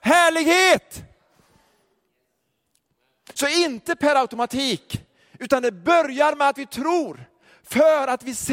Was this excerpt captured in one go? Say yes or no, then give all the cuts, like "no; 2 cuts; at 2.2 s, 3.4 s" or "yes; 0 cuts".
yes; 0 cuts